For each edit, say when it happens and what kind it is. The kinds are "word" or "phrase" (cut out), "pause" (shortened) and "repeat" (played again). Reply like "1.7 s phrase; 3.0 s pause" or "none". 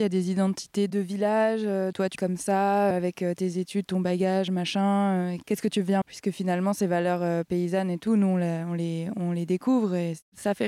2.2 s word; 2.9 s word; 6.0 s word